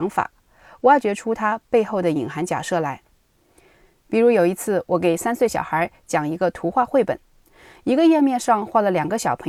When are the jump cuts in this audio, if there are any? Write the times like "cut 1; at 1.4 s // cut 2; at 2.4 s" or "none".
none